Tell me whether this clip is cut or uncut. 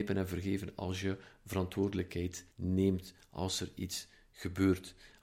cut